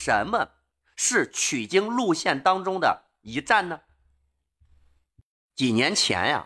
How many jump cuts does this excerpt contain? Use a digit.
0